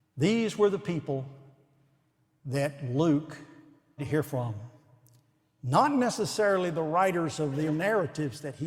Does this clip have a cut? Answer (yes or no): yes